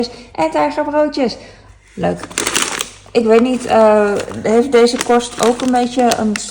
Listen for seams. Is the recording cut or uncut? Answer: uncut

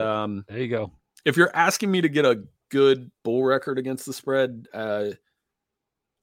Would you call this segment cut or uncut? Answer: uncut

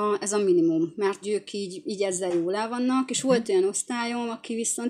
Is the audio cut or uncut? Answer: cut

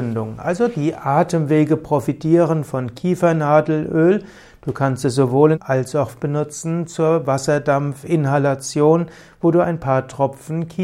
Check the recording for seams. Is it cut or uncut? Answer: cut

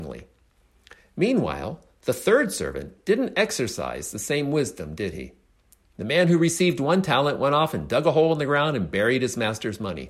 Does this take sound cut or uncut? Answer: uncut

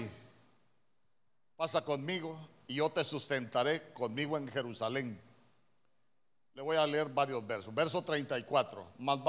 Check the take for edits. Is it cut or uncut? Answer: uncut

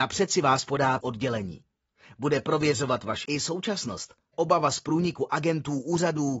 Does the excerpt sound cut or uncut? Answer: cut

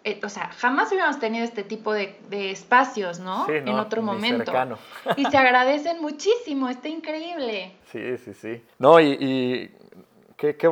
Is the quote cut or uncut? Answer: cut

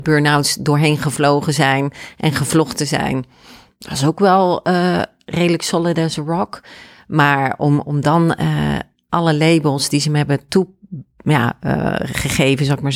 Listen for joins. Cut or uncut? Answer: uncut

